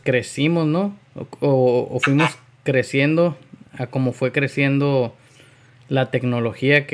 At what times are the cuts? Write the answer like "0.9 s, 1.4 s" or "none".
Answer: none